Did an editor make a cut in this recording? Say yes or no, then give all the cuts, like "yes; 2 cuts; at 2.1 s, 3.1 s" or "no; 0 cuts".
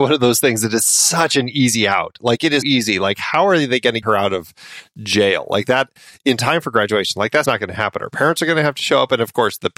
yes; 3 cuts; at 2.6 s, 4.0 s, 7.4 s